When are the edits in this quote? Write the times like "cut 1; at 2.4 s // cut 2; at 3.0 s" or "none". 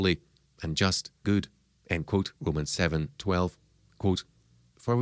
cut 1; at 1.2 s // cut 2; at 2.4 s